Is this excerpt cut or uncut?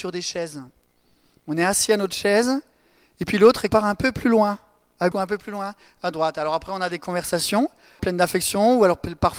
cut